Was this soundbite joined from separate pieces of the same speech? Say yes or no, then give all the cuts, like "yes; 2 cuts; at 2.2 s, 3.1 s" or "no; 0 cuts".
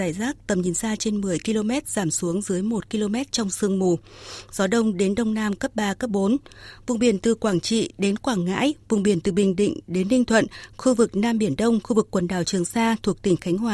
no; 0 cuts